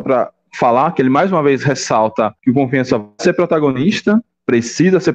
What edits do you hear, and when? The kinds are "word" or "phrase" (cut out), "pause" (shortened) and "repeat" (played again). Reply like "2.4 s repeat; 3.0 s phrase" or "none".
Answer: 2.4 s pause